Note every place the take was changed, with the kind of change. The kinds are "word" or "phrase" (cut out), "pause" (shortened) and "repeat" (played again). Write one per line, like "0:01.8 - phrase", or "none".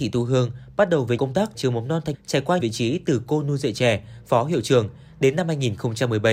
0:01.2 - word
0:01.5 - word
0:02.1 - word
0:02.6 - word